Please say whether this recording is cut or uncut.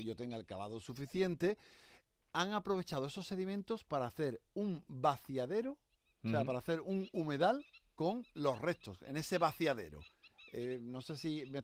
uncut